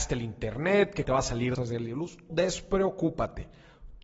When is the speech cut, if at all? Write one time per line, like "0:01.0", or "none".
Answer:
0:01.0
0:01.5
0:02.3